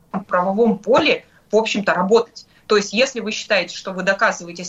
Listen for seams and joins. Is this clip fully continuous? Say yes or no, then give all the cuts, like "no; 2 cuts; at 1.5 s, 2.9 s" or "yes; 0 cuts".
yes; 0 cuts